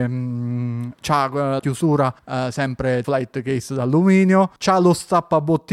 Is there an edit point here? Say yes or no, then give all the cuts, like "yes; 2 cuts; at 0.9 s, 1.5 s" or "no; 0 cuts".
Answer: yes; 4 cuts; at 1.6 s, 2.2 s, 3.0 s, 4.6 s